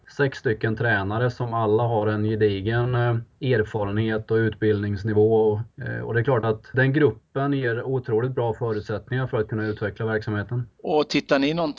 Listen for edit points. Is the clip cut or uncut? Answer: cut